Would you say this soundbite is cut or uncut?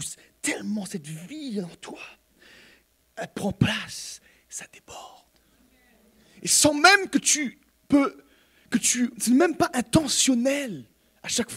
uncut